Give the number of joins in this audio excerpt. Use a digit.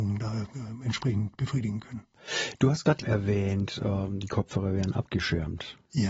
1